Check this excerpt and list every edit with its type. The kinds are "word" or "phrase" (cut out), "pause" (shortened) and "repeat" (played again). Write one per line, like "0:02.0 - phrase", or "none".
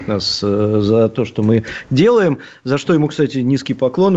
none